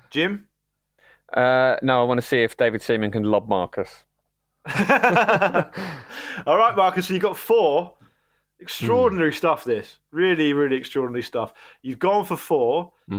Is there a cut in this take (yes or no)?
no